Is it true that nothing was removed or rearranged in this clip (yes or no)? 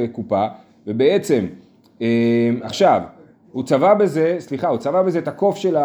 yes